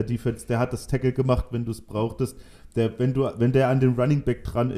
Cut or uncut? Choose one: uncut